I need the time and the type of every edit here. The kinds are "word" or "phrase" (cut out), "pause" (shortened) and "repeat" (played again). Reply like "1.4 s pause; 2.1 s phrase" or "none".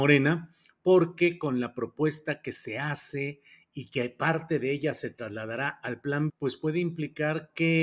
6.3 s word